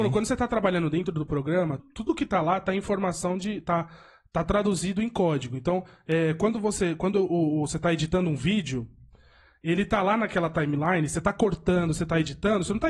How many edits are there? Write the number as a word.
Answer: one